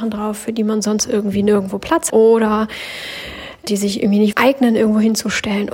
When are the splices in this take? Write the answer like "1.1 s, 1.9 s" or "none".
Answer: 2.1 s, 3.7 s, 4.3 s

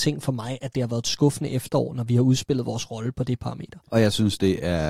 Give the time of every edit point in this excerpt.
3.9 s

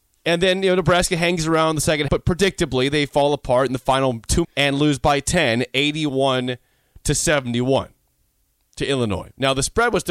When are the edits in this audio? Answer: 2.1 s, 4.4 s

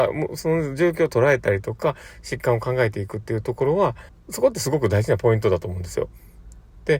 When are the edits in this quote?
4.1 s

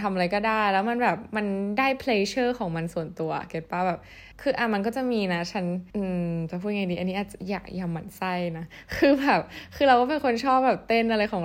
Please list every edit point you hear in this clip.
4.3 s, 5.9 s

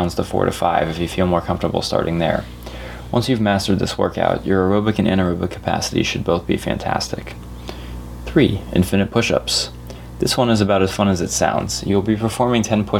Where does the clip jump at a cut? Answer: none

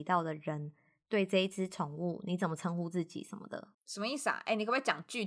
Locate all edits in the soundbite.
3.7 s

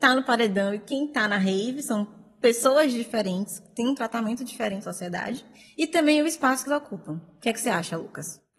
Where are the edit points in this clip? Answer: 4.8 s, 6.7 s

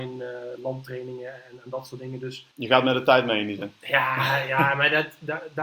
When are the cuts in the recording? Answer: 2.5 s

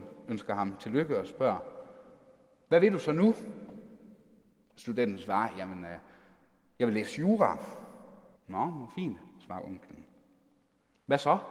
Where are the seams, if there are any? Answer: 8.4 s

